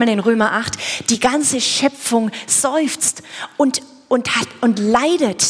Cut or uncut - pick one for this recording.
uncut